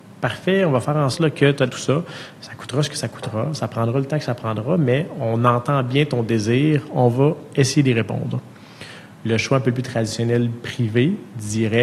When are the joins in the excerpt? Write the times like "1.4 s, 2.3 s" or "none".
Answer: 1.1 s, 1.7 s